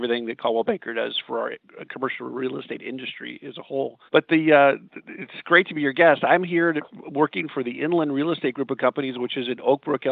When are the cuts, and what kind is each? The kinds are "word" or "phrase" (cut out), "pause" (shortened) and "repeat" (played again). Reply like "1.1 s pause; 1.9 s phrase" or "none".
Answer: 4.1 s pause